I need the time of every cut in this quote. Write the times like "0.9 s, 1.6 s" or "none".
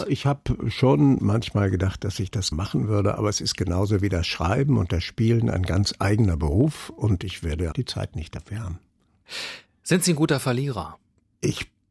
2.5 s, 7.7 s